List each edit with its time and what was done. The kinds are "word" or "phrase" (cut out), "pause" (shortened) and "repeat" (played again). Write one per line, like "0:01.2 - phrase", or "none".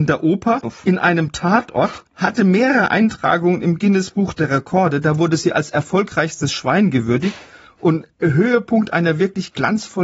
0:02.1 - pause
0:08.1 - pause